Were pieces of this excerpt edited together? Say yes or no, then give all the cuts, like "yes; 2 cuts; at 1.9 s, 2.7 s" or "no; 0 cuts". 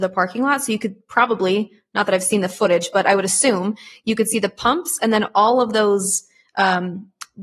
no; 0 cuts